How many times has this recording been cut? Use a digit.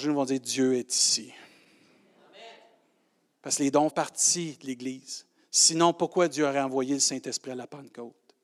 1